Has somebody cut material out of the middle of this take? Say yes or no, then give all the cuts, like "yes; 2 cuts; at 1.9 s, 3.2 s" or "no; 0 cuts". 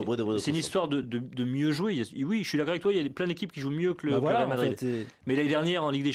yes; 1 cut; at 1.0 s